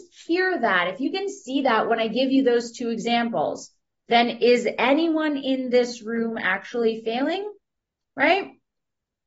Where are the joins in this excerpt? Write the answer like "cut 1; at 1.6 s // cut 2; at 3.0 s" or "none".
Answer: none